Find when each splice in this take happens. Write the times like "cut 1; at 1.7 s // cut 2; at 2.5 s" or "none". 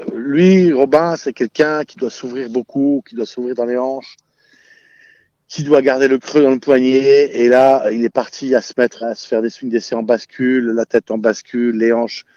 cut 1; at 9.0 s